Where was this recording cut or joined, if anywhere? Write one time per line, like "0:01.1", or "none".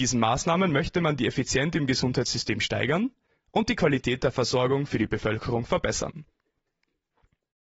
none